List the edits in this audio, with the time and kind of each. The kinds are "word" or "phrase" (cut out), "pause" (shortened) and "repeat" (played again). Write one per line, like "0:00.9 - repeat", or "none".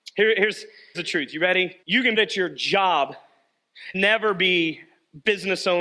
0:00.9 - word
0:01.8 - pause
0:02.2 - phrase
0:03.9 - word